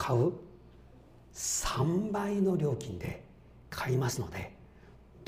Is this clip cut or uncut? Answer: uncut